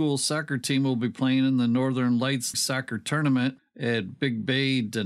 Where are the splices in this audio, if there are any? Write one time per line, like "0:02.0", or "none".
0:02.5